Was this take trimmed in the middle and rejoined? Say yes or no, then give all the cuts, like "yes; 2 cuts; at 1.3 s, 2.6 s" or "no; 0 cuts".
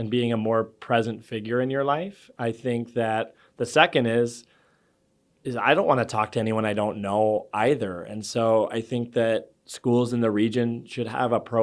no; 0 cuts